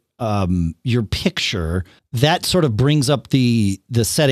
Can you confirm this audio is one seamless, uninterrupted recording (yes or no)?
no